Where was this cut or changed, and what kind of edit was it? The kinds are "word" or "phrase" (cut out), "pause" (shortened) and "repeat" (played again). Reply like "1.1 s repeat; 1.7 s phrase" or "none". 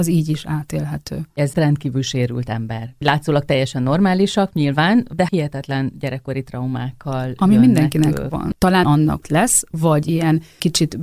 1.5 s word; 5.3 s word; 8.8 s phrase; 9.2 s phrase